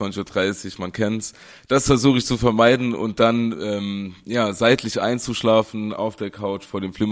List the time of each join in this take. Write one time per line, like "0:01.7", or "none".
none